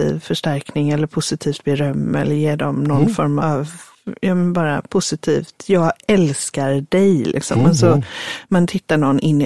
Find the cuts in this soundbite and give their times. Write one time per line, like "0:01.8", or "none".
0:03.4